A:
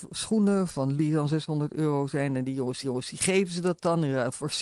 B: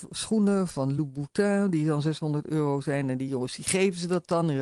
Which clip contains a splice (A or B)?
A